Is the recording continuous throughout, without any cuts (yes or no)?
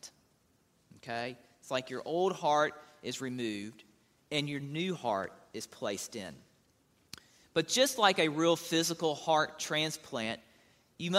yes